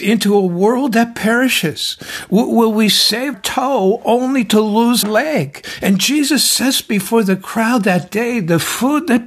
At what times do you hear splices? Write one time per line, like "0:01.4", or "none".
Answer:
0:03.3
0:05.0